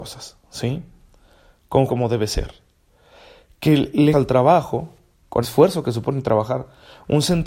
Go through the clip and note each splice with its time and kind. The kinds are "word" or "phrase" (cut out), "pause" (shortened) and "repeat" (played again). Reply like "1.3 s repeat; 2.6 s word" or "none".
1.9 s word; 4.1 s word; 5.4 s word